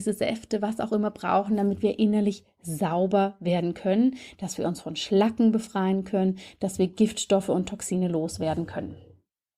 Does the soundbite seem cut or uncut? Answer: uncut